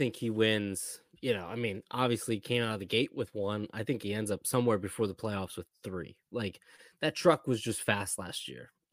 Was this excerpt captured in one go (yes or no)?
yes